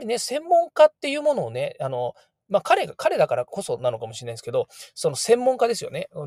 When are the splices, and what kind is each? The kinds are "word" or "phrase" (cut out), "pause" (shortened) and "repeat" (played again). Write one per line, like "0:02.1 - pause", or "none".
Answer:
none